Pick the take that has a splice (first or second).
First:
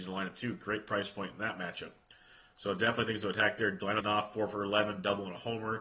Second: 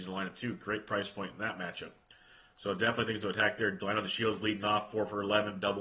first